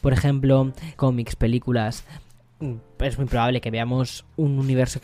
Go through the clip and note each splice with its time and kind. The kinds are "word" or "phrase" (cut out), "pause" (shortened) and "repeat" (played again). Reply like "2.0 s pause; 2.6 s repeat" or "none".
0.9 s word